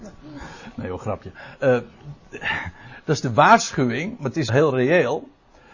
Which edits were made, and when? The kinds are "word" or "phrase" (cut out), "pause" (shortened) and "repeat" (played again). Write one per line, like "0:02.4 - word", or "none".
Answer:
0:04.5 - word